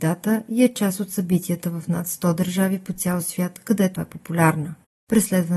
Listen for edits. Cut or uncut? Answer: cut